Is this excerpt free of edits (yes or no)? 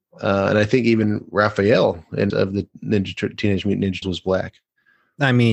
no